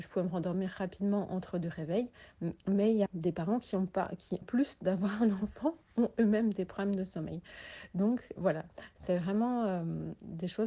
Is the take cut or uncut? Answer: cut